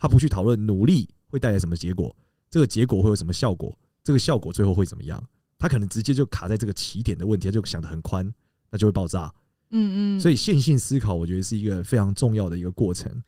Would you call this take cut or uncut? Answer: uncut